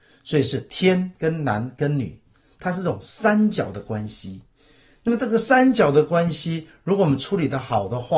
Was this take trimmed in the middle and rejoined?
no; 0 cuts

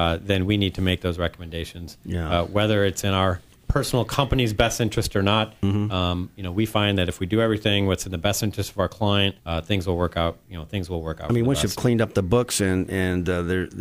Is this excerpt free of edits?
no; 1 cut; at 9.4 s

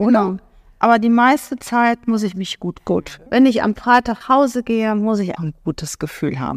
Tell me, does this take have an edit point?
yes; 3 cuts; at 3.3 s, 4.2 s, 5.4 s

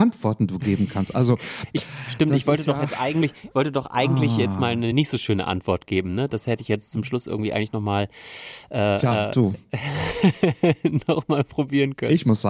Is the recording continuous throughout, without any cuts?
yes; 0 cuts

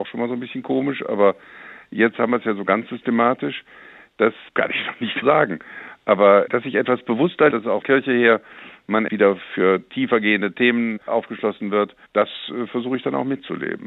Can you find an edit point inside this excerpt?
yes; 7 cuts; at 4.5 s, 5.2 s, 6.5 s, 7.5 s, 7.8 s, 9.1 s, 12.1 s

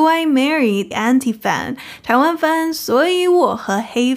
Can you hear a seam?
yes; 1 cut; at 0.9 s

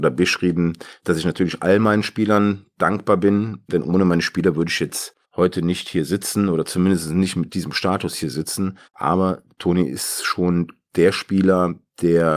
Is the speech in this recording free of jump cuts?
no; 2 cuts; at 5.2 s, 8.9 s

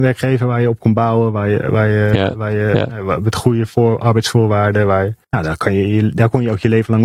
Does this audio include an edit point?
yes; 1 cut; at 5.2 s

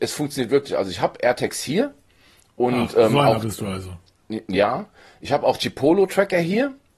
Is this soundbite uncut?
yes; 0 cuts

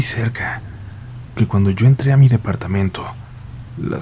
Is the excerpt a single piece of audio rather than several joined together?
no; 1 cut; at 1.4 s

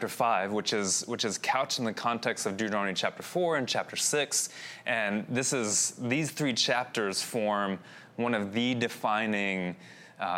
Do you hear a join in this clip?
no; 0 cuts

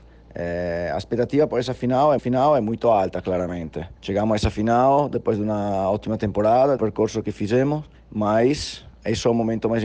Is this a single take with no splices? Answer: no; 4 cuts; at 2.2 s, 4.0 s, 6.8 s, 7.9 s

